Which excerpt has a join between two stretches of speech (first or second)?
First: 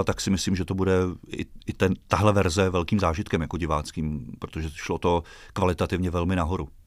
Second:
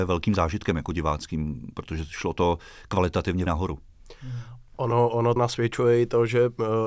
second